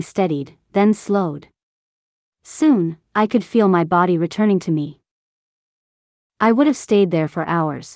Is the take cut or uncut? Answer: uncut